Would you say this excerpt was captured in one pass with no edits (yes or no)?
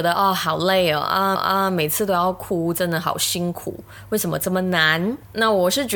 no